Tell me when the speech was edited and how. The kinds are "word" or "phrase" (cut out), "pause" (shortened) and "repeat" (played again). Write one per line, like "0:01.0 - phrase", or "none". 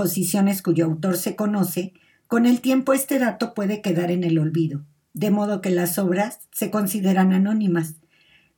none